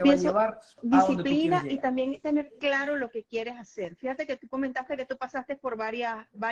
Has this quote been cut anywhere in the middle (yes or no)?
no